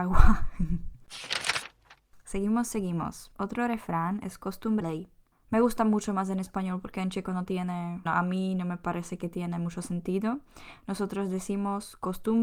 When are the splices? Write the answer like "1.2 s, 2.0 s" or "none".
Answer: 4.8 s, 8.1 s

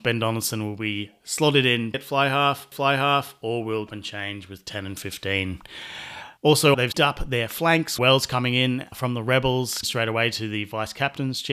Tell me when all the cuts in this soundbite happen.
1.9 s, 2.7 s, 3.9 s, 6.4 s, 6.9 s, 8.0 s, 9.8 s

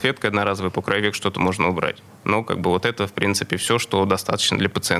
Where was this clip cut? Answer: none

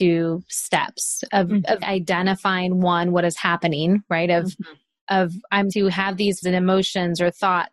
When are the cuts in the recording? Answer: 1.8 s, 5.7 s, 6.4 s

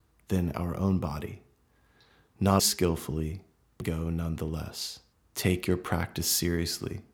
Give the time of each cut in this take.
2.6 s, 3.8 s, 5.1 s

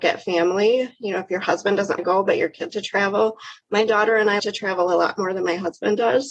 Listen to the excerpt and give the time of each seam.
2.0 s, 2.7 s, 4.4 s

